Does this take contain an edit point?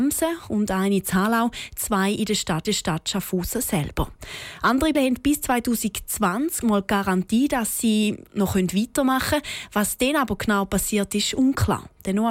yes; 3 cuts; at 2.6 s, 4.9 s, 6.6 s

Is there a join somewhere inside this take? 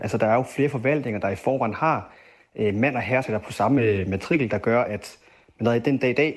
no; 0 cuts

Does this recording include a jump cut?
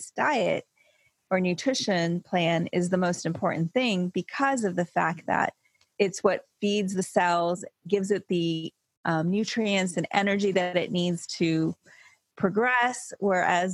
no; 0 cuts

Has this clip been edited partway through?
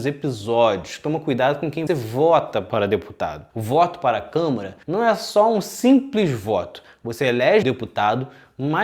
yes; 4 cuts; at 1.9 s, 3.5 s, 4.8 s, 7.6 s

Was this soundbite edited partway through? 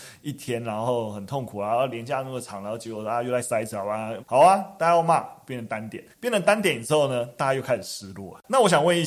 yes; 2 cuts; at 4.2 s, 6.1 s

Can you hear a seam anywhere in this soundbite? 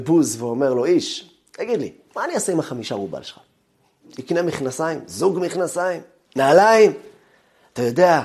no; 0 cuts

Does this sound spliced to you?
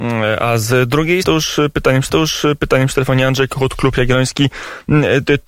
yes; 2 cuts; at 1.2 s, 2.1 s

